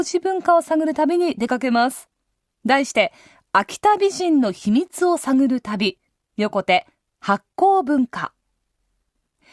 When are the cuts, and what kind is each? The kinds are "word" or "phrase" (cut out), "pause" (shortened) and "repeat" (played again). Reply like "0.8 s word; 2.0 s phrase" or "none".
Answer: none